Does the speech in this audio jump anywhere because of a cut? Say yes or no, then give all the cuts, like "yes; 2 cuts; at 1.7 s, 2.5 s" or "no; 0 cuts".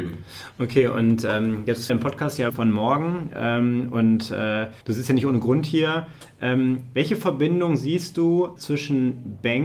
yes; 4 cuts; at 1.9 s, 2.5 s, 4.8 s, 8.6 s